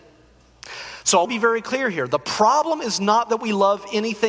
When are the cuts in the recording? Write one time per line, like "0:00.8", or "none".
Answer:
0:01.2